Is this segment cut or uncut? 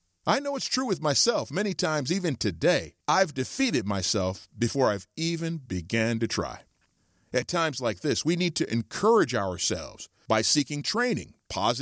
cut